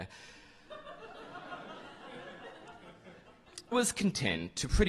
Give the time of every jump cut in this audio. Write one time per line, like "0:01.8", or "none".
0:03.7